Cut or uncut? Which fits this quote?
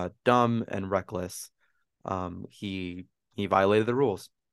uncut